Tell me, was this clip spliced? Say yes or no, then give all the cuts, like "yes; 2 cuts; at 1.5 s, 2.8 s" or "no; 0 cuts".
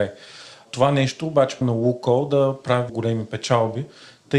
yes; 2 cuts; at 1.6 s, 2.9 s